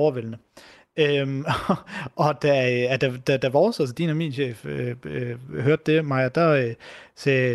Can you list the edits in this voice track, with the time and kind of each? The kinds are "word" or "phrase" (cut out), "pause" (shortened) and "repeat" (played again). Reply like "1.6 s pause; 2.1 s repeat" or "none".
none